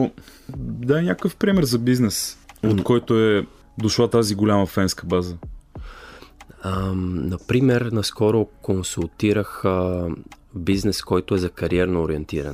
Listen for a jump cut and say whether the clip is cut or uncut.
cut